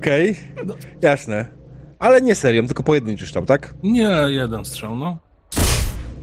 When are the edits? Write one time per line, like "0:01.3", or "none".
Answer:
none